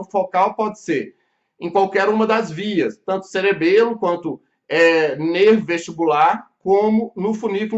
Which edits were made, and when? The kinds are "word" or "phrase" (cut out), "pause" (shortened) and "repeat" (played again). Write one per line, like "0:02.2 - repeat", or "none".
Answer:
none